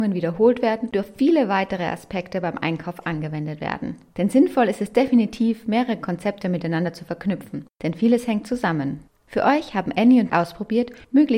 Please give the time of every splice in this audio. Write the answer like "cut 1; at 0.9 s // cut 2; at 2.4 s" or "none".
cut 1; at 0.9 s // cut 2; at 9.1 s // cut 3; at 10.3 s